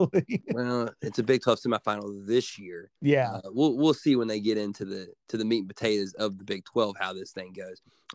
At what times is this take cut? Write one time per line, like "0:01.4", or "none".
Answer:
0:03.0